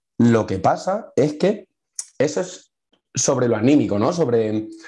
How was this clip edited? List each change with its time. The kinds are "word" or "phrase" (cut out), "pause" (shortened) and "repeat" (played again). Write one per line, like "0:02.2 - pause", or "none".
none